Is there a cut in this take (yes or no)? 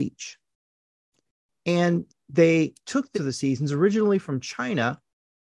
yes